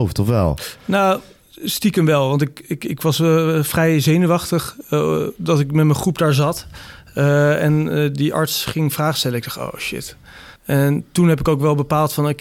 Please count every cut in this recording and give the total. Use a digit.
1